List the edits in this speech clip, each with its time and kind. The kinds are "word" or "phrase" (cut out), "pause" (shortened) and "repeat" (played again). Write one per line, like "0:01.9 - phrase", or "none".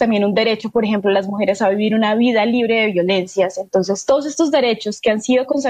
none